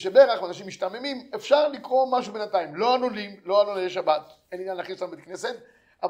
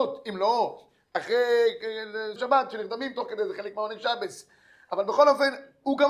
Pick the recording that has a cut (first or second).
second